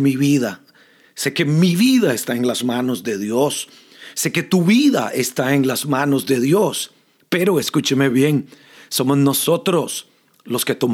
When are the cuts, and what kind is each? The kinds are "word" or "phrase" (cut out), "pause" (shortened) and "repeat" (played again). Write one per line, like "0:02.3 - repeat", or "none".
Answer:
none